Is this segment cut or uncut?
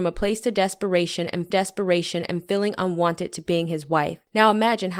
cut